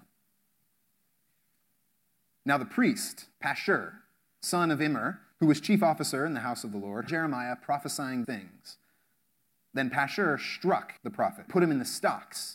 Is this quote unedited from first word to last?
no; 6 cuts; at 3.3 s, 5.3 s, 7.1 s, 8.2 s, 11.0 s, 11.5 s

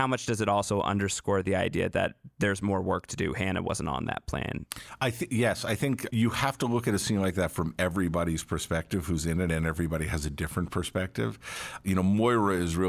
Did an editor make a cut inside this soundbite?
no; 0 cuts

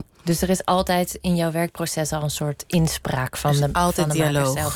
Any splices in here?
no; 0 cuts

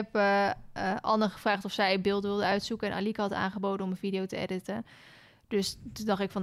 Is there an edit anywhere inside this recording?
no; 0 cuts

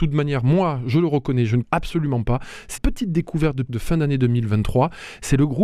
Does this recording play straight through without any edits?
no; 3 cuts; at 1.6 s, 2.8 s, 3.7 s

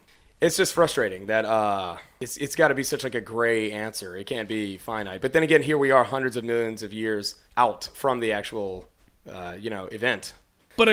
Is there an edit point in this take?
yes; 1 cut; at 7.4 s

